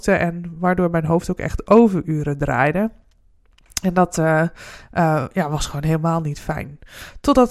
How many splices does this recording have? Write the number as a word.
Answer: zero